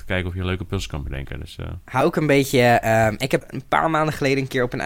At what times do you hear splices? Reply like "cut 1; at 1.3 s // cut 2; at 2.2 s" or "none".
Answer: cut 1; at 2.0 s // cut 2; at 3.4 s